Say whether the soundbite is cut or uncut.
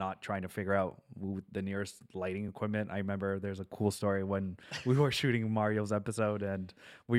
uncut